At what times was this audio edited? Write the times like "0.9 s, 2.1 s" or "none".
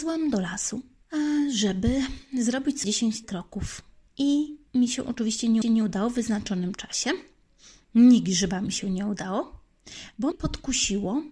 2.8 s, 3.2 s, 5.6 s, 10.3 s